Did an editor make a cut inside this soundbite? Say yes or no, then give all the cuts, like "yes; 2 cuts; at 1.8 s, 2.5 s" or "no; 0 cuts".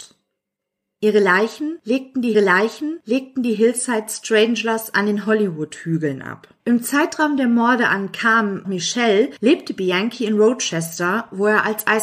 yes; 3 cuts; at 2.3 s, 6.6 s, 8.6 s